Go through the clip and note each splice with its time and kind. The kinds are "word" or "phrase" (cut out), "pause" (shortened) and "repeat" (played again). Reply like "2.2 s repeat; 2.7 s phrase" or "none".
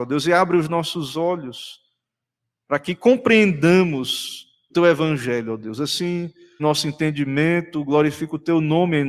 4.7 s word; 6.6 s word